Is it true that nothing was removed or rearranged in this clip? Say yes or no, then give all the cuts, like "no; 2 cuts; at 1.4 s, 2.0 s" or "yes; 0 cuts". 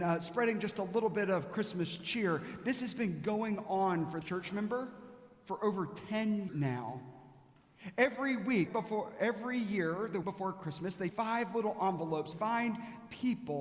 no; 6 cuts; at 4.2 s, 6.5 s, 8.7 s, 10.2 s, 11.1 s, 12.3 s